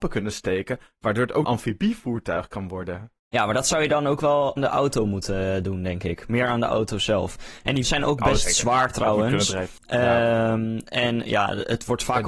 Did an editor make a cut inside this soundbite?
yes; 5 cuts; at 1.4 s, 3.2 s, 4.6 s, 7.8 s, 9.8 s

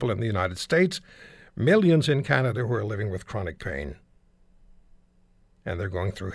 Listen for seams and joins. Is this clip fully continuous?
yes; 0 cuts

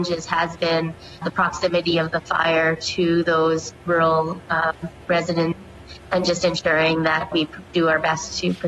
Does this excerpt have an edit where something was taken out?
yes; 2 cuts; at 1.2 s, 7.3 s

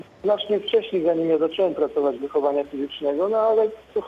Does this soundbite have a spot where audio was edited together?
yes; 1 cut; at 2.2 s

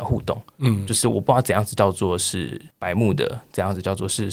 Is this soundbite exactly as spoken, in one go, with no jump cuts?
no; 1 cut; at 2.7 s

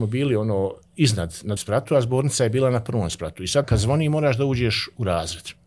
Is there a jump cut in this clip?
yes; 2 cuts; at 1.6 s, 3.6 s

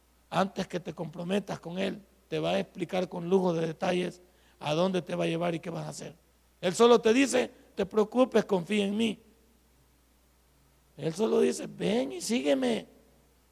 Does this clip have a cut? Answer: yes; 1 cut; at 7.7 s

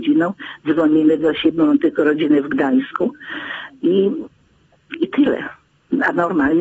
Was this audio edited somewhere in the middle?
no; 0 cuts

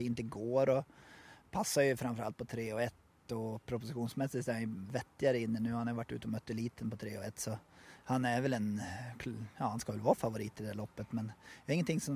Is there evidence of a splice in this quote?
no; 0 cuts

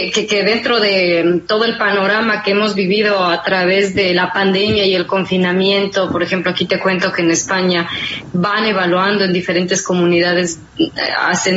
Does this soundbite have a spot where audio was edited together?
no; 0 cuts

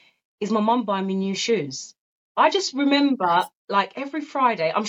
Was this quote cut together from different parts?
no; 0 cuts

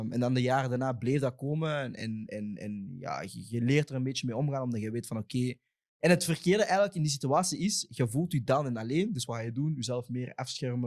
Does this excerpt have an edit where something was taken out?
no; 0 cuts

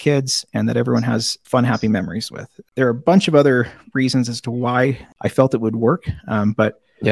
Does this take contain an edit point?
yes; 1 cut; at 1.4 s

